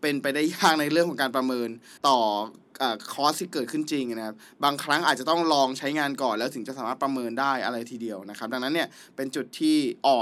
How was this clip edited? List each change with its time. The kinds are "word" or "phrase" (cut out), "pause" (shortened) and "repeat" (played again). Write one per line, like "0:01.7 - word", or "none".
0:02.0 - pause